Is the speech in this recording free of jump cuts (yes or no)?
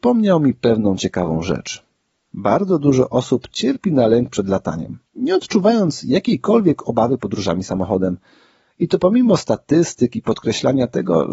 no